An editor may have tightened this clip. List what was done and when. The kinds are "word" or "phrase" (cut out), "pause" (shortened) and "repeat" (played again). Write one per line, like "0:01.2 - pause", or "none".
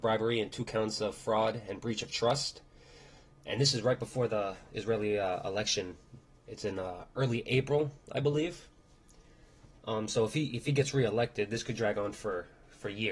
none